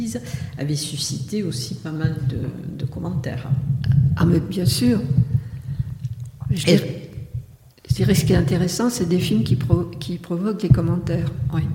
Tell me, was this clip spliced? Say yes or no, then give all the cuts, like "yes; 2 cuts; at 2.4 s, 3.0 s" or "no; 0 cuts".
no; 0 cuts